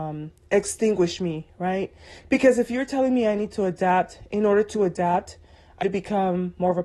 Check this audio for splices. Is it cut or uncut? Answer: cut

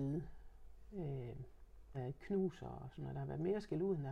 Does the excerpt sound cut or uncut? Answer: cut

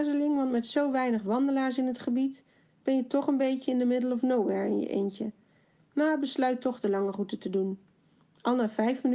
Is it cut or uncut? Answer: uncut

